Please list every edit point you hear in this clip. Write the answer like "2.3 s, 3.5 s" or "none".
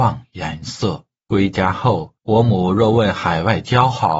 1.2 s, 2.2 s